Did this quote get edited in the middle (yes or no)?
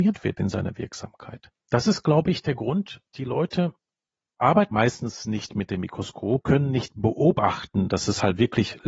yes